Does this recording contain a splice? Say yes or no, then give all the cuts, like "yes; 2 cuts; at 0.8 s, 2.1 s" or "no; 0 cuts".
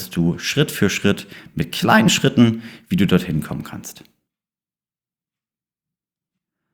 no; 0 cuts